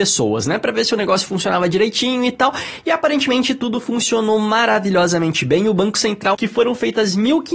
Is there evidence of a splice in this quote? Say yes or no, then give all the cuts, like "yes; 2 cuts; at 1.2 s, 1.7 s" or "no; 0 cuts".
yes; 1 cut; at 6.3 s